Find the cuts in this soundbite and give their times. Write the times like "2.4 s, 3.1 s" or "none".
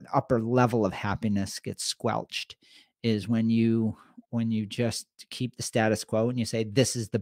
none